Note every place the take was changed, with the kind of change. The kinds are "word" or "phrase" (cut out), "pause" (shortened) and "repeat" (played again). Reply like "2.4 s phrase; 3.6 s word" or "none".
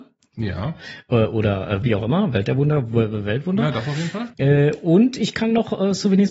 1.8 s word; 4.3 s pause